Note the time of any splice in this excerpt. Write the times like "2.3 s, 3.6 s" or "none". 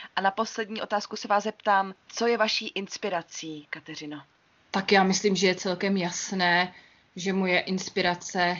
none